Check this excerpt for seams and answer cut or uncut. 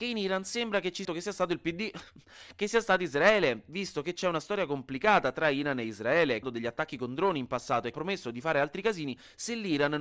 cut